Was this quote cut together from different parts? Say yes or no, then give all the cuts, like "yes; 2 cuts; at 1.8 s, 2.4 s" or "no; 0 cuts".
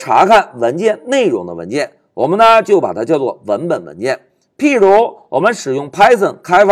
no; 0 cuts